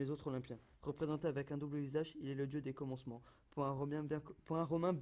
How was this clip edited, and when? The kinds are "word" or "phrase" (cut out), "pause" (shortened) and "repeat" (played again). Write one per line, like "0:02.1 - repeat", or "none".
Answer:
none